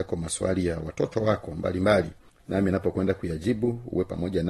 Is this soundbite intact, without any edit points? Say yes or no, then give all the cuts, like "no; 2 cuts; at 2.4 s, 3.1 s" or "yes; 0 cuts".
yes; 0 cuts